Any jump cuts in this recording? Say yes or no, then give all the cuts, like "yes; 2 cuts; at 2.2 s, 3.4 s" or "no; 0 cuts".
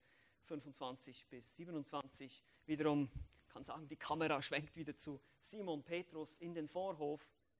no; 0 cuts